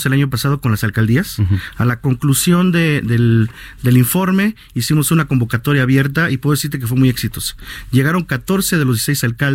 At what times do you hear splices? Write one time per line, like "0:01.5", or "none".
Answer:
none